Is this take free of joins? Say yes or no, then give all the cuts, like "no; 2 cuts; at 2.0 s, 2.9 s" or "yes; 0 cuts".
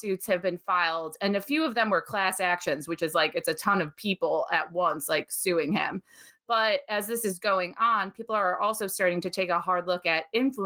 yes; 0 cuts